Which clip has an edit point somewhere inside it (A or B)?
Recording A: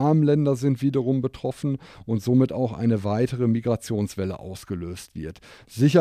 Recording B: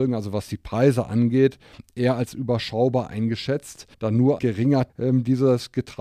B